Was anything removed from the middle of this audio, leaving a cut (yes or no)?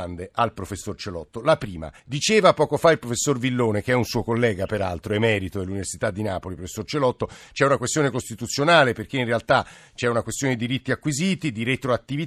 yes